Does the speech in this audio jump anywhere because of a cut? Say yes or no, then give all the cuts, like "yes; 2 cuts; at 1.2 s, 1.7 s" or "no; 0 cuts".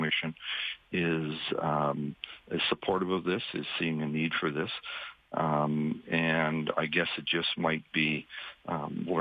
no; 0 cuts